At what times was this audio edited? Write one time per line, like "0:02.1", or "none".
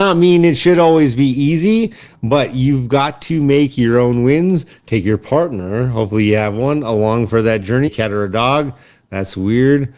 0:07.9